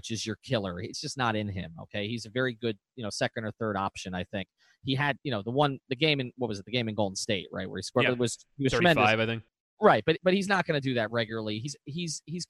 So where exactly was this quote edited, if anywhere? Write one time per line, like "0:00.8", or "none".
none